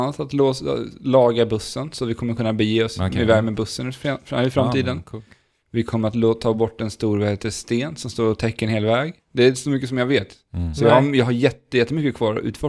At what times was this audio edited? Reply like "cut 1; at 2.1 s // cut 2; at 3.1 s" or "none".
none